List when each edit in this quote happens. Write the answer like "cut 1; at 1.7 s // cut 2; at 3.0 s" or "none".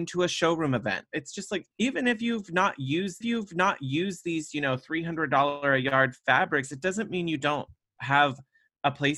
cut 1; at 1.7 s // cut 2; at 3.2 s